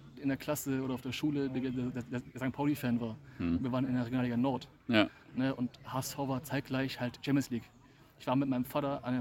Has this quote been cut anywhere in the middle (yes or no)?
no